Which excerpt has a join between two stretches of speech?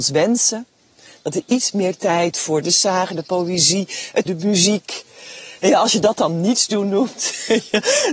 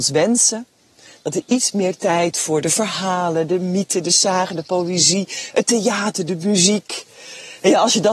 first; 2 cuts; at 2.6 s, 4.3 s

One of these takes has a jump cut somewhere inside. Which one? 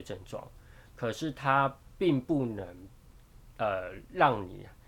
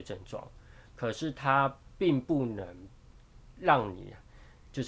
second; 1 cut; at 3.5 s

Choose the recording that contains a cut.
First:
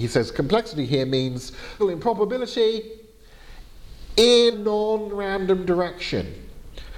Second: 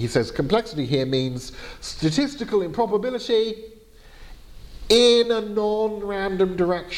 first; 2 cuts; at 1.8 s, 4.5 s

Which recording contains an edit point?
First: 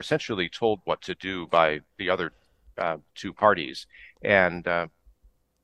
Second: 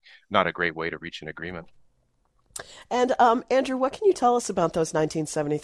first; 2 cuts; at 1.9 s, 3.1 s

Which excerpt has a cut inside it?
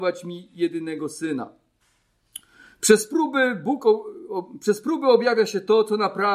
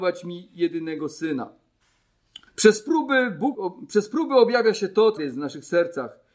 second; 3 cuts; at 2.5 s, 3.5 s, 5.2 s

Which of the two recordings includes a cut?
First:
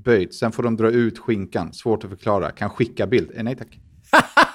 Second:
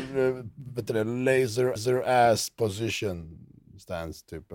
second; 1 cut; at 1.8 s

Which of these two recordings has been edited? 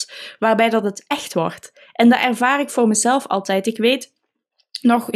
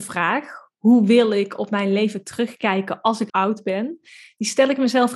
second; 1 cut; at 3.3 s

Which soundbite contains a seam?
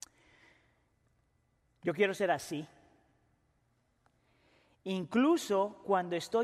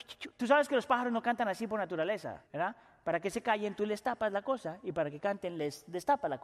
second; 1 cut; at 2.5 s

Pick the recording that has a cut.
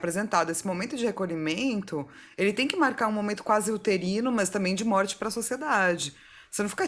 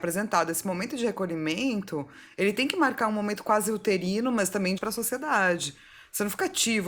second; 1 cut; at 4.8 s

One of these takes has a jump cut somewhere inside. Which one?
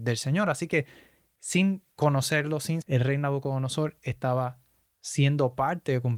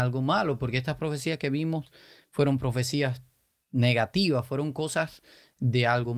first; 2 cuts; at 1.9 s, 2.8 s

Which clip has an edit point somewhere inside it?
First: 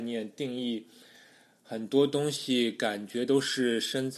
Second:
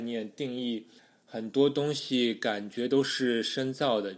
second; 1 cut; at 1.0 s

